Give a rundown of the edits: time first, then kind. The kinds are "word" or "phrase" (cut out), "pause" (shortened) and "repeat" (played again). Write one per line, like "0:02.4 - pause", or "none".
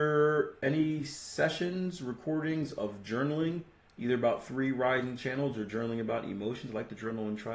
none